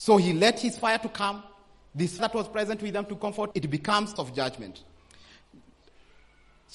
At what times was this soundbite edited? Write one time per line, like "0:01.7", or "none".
0:02.2
0:03.5
0:04.2